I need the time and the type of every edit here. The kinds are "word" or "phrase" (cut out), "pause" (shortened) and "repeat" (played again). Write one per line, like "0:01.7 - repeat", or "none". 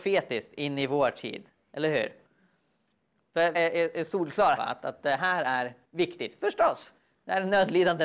0:03.5 - word
0:04.6 - word